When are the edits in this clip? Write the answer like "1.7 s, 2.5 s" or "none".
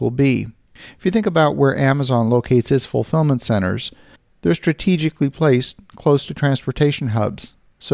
none